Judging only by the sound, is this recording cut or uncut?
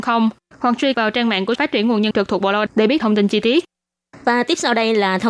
cut